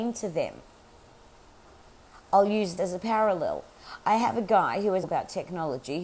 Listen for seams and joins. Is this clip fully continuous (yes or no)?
no